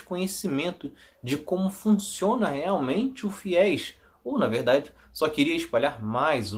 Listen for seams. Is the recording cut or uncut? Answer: uncut